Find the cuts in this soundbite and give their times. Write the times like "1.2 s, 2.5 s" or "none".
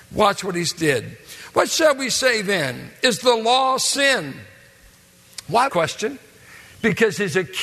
5.7 s

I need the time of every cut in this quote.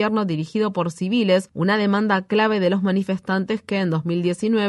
none

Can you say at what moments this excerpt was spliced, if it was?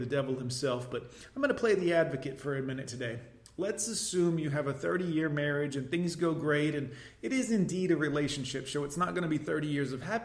none

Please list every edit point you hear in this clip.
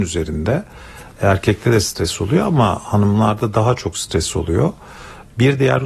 none

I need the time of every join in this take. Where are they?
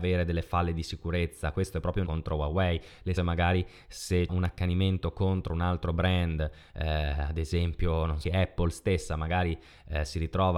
2.0 s, 3.2 s, 4.3 s, 8.2 s

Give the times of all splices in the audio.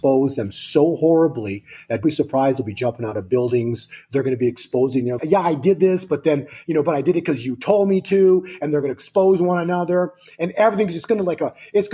2.0 s, 5.2 s

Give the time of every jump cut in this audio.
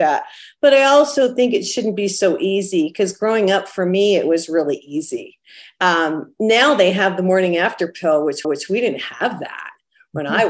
8.4 s

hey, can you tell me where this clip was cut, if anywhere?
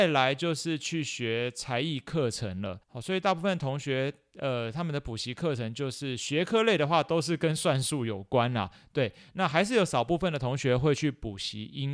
2.8 s

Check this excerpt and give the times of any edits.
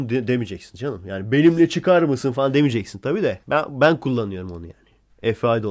3.4 s

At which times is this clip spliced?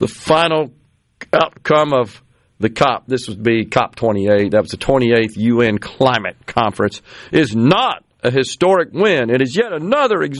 none

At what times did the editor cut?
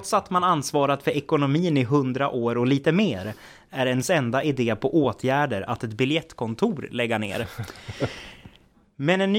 none

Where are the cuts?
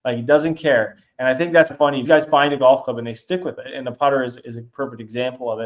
1.7 s, 2.0 s

